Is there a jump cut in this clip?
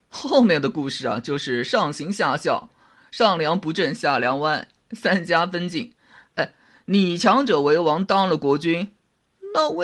no; 0 cuts

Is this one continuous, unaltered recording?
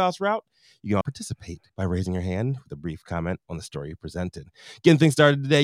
no; 2 cuts; at 1.0 s, 1.7 s

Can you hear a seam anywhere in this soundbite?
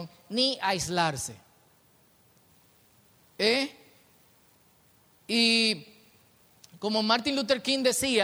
no; 0 cuts

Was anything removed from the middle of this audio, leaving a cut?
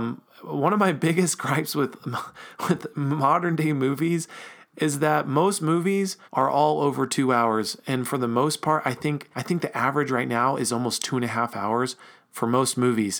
yes; 2 cuts; at 6.2 s, 9.3 s

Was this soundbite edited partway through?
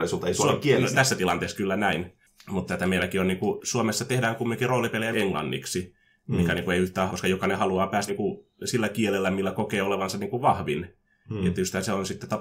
yes; 5 cuts; at 0.9 s, 2.7 s, 5.1 s, 7.1 s, 8.1 s

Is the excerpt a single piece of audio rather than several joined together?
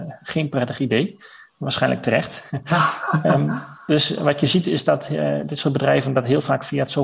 yes; 0 cuts

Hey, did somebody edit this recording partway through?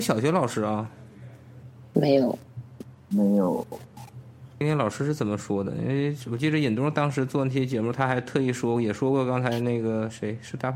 no; 0 cuts

